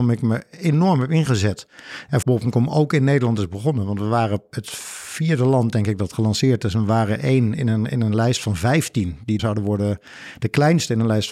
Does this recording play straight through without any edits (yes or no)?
no